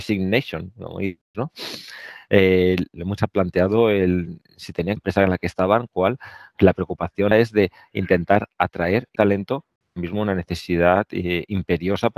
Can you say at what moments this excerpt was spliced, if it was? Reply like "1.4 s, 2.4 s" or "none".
1.3 s, 3.2 s, 4.4 s, 5.0 s, 5.9 s, 7.3 s, 9.2 s